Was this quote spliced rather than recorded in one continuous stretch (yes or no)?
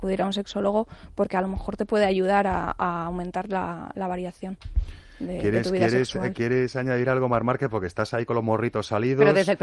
no